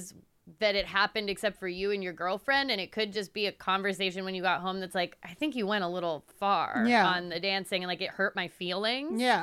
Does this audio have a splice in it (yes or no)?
no